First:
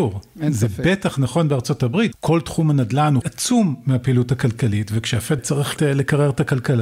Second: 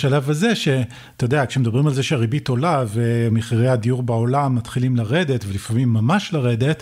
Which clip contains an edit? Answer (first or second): first